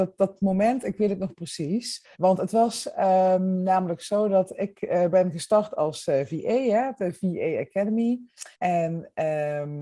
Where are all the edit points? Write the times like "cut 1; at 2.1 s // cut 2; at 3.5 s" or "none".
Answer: cut 1; at 2.1 s // cut 2; at 8.5 s